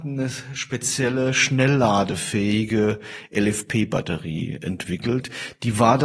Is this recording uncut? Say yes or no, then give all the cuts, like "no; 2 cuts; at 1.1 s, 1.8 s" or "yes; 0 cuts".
yes; 0 cuts